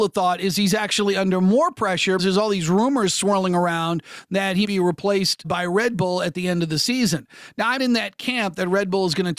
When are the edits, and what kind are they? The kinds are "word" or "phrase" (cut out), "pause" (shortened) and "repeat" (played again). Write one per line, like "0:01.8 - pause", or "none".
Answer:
0:02.2 - word
0:04.6 - word
0:05.4 - word
0:07.8 - word